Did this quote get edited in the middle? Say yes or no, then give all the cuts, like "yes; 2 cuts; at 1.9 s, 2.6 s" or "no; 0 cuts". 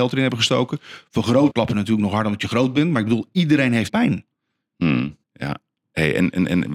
yes; 3 cuts; at 1.5 s, 3.9 s, 5.2 s